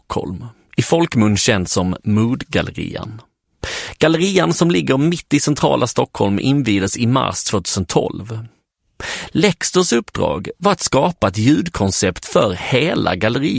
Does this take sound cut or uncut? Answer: uncut